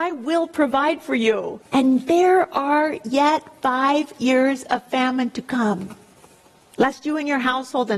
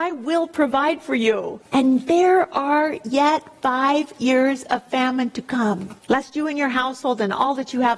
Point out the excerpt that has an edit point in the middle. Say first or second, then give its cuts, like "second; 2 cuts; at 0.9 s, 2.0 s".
second; 1 cut; at 6.0 s